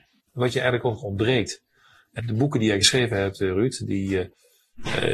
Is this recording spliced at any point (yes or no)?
yes